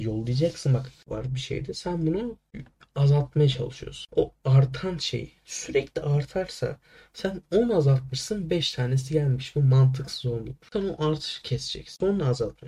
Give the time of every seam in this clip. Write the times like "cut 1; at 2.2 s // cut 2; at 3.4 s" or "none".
none